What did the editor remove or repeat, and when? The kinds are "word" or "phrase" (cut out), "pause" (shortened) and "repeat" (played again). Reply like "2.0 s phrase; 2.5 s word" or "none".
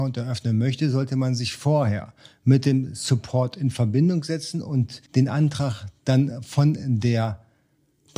5.1 s pause